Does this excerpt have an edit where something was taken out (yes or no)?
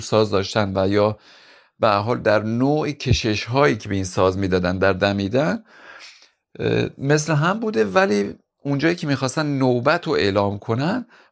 no